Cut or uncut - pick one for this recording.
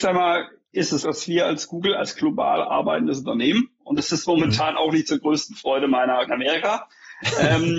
cut